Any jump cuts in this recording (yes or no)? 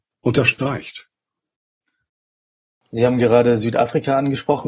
no